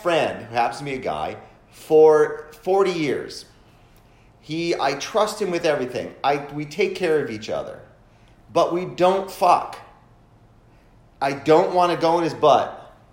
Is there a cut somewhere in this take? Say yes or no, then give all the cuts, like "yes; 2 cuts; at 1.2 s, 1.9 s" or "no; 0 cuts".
no; 0 cuts